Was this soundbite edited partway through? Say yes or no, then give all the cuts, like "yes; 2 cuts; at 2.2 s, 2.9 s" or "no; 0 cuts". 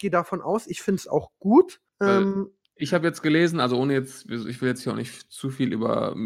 yes; 1 cut; at 1.9 s